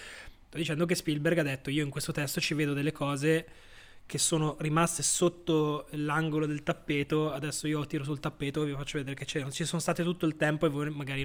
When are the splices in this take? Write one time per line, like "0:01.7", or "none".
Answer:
none